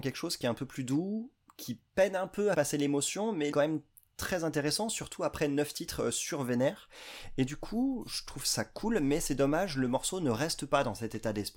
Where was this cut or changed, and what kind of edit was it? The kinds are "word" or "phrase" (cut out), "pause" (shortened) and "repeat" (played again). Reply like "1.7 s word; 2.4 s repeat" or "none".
2.5 s phrase; 3.5 s phrase; 7.5 s word